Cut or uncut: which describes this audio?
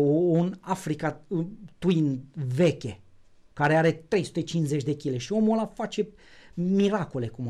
uncut